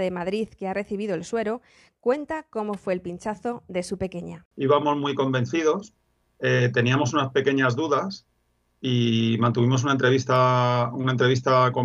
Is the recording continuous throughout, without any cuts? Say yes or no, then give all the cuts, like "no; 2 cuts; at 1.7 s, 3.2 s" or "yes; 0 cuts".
yes; 0 cuts